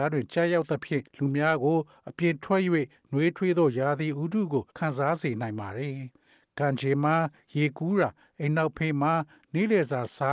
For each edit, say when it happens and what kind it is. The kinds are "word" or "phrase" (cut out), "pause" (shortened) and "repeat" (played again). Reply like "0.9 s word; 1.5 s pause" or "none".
1.1 s pause; 4.7 s pause